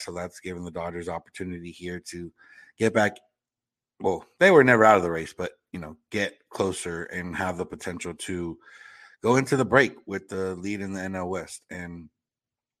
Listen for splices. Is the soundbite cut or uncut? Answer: uncut